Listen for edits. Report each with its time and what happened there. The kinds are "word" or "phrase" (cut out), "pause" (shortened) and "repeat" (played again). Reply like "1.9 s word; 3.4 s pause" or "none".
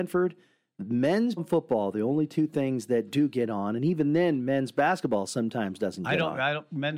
1.4 s word